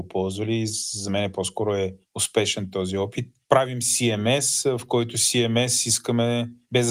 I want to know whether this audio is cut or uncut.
uncut